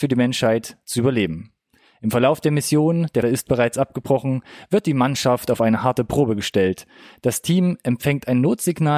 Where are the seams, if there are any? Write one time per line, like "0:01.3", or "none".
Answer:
0:03.2

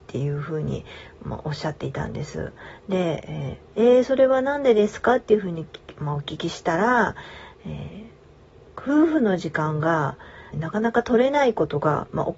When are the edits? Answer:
0:10.5

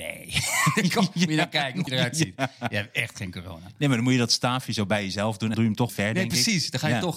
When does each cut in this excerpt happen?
0:01.9
0:05.5
0:05.9

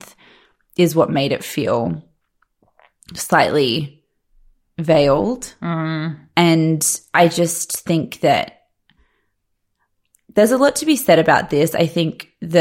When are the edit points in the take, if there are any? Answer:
none

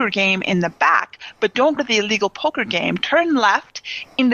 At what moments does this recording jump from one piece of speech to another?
0:01.8

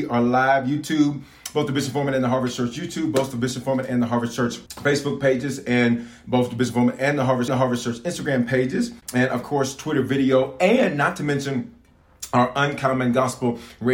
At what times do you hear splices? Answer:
0:04.7
0:07.5
0:09.0

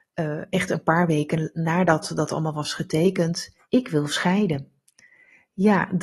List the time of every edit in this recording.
0:03.6

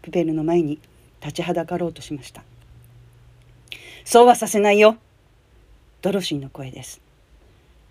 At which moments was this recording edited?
none

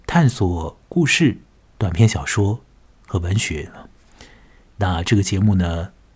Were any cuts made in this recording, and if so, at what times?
none

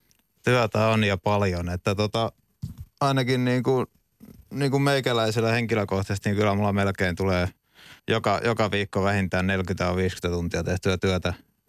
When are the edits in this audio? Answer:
0:04.4
0:08.0

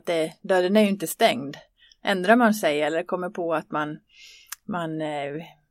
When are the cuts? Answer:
none

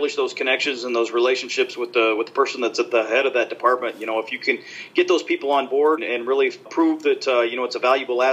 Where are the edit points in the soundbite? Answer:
0:06.0
0:06.7

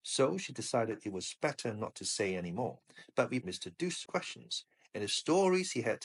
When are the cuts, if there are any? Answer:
0:03.4
0:04.0

